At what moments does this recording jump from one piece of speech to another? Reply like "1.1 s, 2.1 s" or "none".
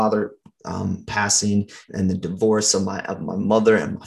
1.9 s